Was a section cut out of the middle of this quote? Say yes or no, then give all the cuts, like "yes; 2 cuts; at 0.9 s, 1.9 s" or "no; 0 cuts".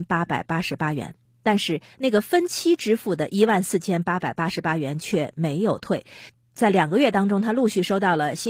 no; 0 cuts